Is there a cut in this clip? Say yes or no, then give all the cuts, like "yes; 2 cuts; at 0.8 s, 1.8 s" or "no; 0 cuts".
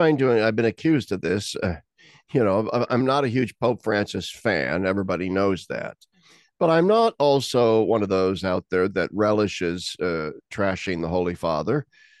no; 0 cuts